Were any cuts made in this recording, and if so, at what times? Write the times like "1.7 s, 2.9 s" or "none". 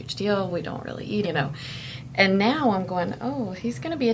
1.2 s